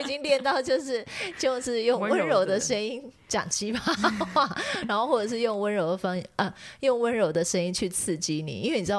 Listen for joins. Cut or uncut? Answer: uncut